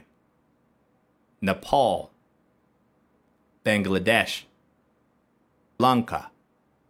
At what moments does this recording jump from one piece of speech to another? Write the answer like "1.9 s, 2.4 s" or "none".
5.8 s